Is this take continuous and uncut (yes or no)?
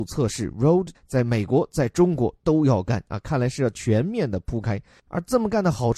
no